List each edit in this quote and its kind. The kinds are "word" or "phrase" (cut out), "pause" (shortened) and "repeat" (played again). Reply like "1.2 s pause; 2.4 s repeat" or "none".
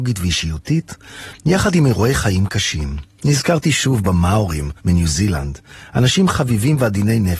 3.1 s pause; 4.8 s pause

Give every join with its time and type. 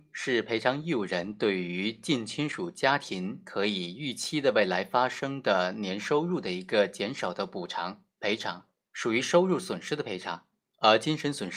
8.9 s pause; 10.7 s pause

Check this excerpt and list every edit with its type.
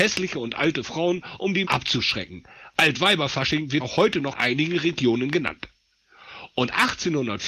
1.6 s word; 3.8 s word; 4.3 s word

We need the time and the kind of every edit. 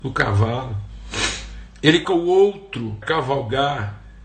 2.0 s word; 3.0 s word

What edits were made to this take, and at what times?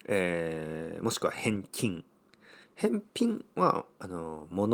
2.6 s pause

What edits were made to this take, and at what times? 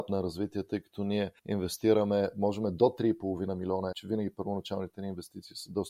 1.4 s pause; 3.9 s phrase

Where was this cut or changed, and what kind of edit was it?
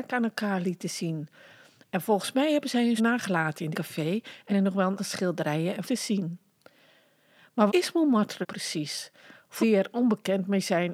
3.0 s word; 3.7 s word; 4.5 s word; 5.0 s word; 5.8 s word; 7.7 s word; 8.4 s word; 9.6 s word

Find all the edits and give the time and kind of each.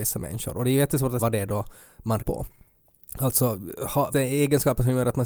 1.2 s word; 2.2 s word; 4.1 s word

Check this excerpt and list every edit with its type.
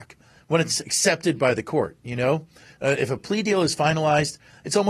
none

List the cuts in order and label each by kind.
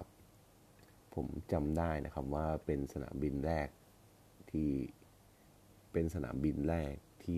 5.4 s pause

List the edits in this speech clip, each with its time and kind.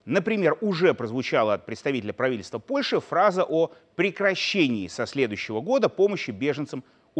none

